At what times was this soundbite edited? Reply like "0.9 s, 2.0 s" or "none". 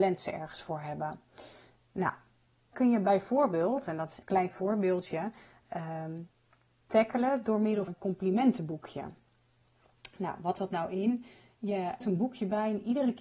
2.7 s, 4.2 s, 6.8 s, 7.9 s, 10.6 s, 12.0 s

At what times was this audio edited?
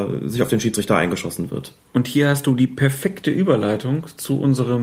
none

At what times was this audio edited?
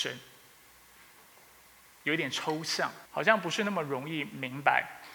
3.1 s

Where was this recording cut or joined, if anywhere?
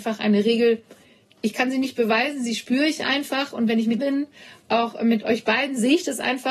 4.0 s

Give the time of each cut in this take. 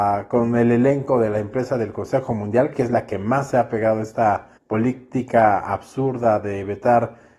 4.6 s

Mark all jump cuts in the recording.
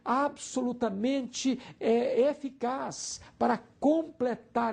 none

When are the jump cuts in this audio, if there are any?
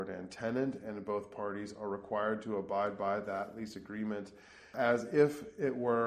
none

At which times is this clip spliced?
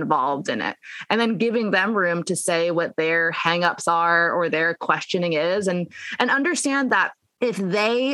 none

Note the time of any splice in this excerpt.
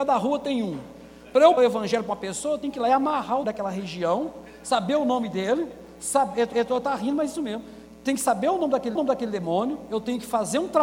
1.6 s, 3.4 s, 6.5 s, 8.9 s

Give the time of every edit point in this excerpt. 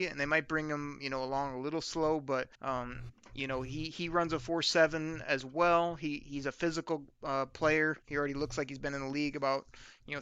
2.5 s, 8.0 s

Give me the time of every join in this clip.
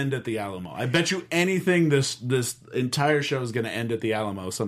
none

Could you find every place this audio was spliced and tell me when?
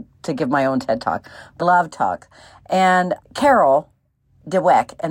1.6 s, 1.9 s, 3.2 s

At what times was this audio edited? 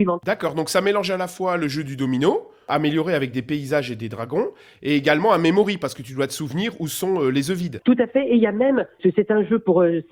none

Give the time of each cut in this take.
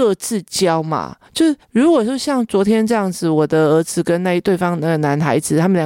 1.2 s, 1.6 s

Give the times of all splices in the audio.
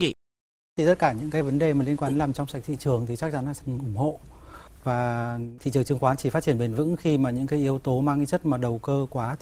3.6 s

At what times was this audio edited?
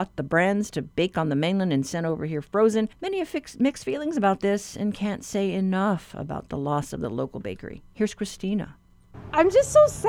2.9 s

